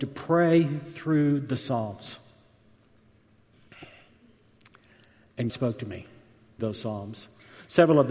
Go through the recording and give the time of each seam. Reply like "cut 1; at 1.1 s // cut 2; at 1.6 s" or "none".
cut 1; at 5.5 s // cut 2; at 6.6 s